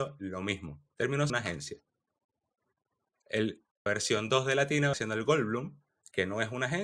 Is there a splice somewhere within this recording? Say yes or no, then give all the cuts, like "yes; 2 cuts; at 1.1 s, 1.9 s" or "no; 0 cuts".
yes; 3 cuts; at 1.3 s, 3.9 s, 4.9 s